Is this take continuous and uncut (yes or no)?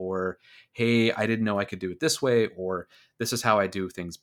yes